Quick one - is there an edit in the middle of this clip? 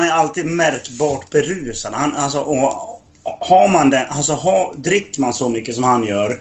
no; 0 cuts

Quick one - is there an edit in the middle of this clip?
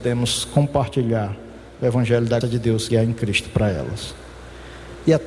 yes; 2 cuts; at 2.4 s, 2.9 s

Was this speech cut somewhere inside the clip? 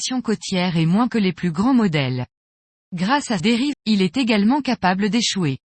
yes; 3 cuts; at 1.1 s, 3.4 s, 3.7 s

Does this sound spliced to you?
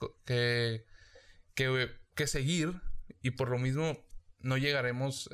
no; 0 cuts

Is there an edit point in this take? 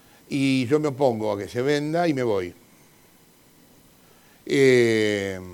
no; 0 cuts

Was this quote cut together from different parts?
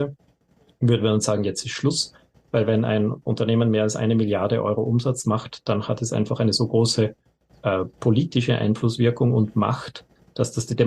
no; 0 cuts

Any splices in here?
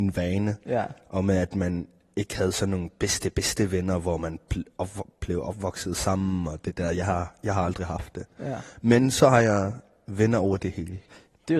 no; 0 cuts

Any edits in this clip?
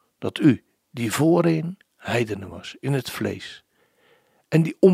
no; 0 cuts

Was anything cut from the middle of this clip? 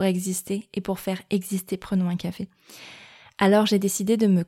no; 0 cuts

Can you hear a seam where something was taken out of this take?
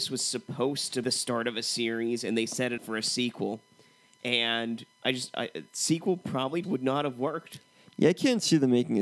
yes; 4 cuts; at 1.0 s, 2.8 s, 4.9 s, 6.6 s

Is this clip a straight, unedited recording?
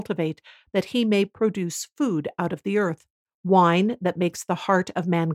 yes; 0 cuts

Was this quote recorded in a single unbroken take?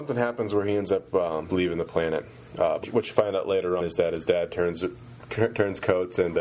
no; 3 cuts; at 1.5 s, 2.8 s, 3.8 s

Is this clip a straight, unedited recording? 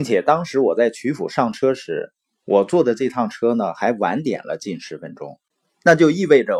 yes; 0 cuts

